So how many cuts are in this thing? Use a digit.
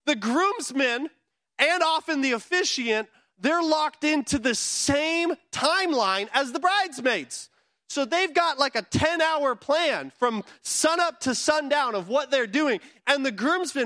0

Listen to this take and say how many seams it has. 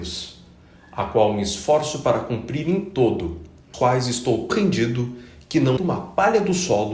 3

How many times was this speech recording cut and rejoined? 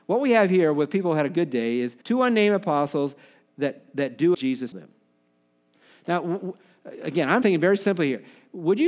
4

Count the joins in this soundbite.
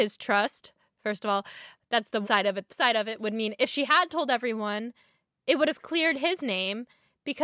2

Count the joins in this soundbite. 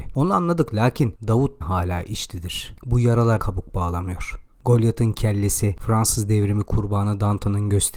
3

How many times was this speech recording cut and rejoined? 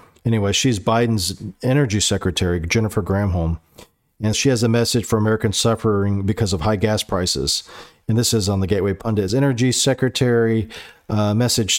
2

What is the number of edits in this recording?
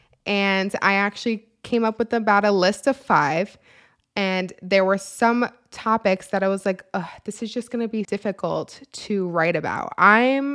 1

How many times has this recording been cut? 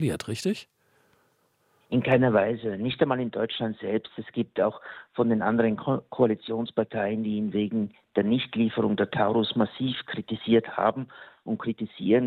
0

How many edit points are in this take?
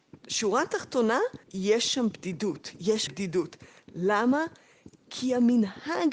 2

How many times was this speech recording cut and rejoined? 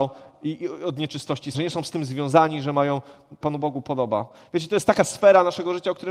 2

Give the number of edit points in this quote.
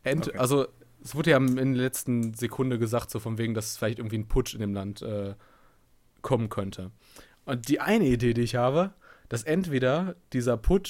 0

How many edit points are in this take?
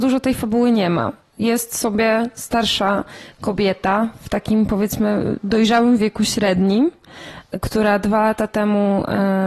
0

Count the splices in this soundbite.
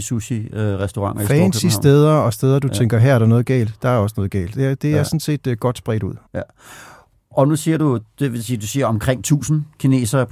1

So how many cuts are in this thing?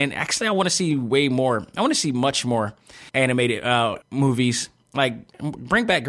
2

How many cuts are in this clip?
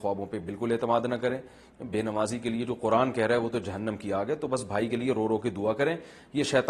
0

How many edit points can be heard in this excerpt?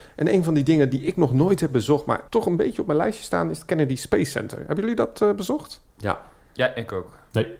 2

